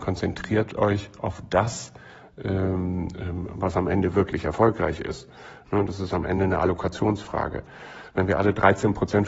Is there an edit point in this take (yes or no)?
no